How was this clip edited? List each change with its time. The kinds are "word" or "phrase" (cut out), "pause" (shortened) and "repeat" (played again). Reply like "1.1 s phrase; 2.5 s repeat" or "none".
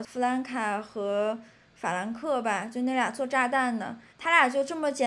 4.1 s pause

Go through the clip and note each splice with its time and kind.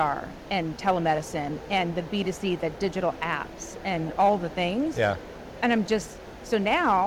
none

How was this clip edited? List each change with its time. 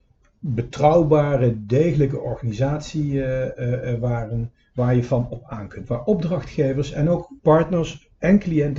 7.4 s pause

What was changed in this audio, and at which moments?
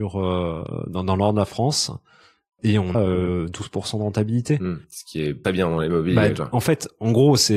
2.9 s word; 5.4 s word

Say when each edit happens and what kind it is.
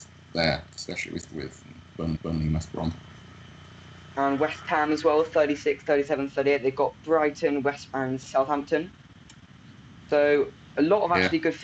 1.3 s phrase; 2.1 s repeat; 7.9 s word

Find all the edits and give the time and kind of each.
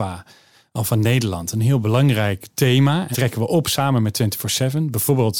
3.1 s word

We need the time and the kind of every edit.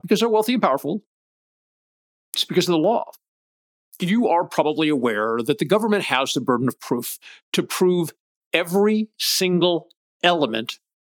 none

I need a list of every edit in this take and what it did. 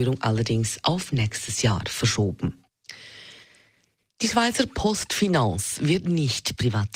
none

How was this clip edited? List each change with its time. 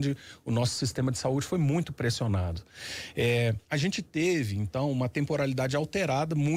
3.6 s pause

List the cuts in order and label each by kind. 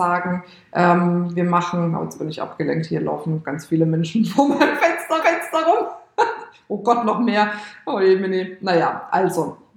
5.2 s repeat

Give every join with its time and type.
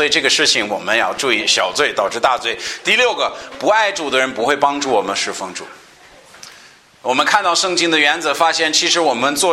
none

